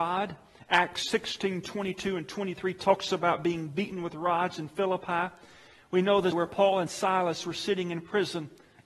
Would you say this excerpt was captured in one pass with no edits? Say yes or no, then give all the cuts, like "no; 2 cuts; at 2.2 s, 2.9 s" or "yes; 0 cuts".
no; 1 cut; at 6.3 s